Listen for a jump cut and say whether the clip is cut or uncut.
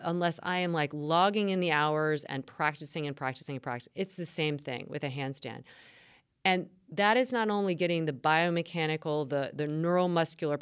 uncut